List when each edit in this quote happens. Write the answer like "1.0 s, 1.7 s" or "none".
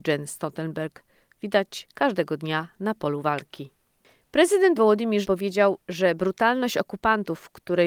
4.8 s, 5.2 s